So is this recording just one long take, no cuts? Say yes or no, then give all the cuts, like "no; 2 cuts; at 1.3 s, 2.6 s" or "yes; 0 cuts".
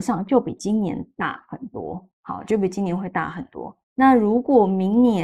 no; 2 cuts; at 2.1 s, 3.8 s